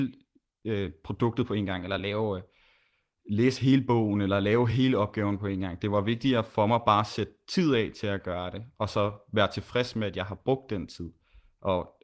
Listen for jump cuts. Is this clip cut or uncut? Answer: uncut